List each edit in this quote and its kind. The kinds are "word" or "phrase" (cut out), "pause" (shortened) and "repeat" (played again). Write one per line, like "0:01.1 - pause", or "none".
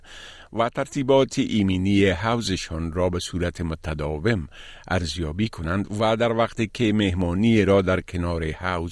none